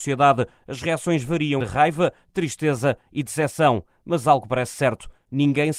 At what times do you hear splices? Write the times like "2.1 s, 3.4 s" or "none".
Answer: 1.6 s